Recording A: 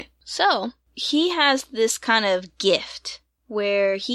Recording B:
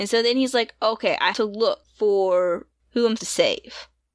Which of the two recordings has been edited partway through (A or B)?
B